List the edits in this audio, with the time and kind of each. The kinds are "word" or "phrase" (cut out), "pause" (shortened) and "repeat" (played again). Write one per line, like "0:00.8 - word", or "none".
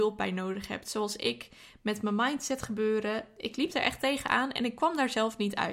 none